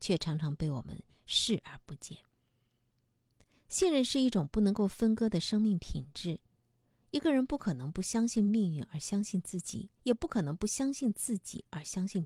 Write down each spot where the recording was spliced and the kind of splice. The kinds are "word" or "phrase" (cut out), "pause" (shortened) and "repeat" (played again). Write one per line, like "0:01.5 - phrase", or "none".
0:10.0 - pause